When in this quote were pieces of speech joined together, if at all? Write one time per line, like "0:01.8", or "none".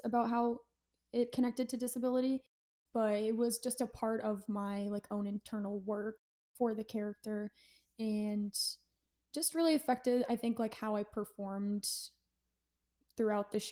none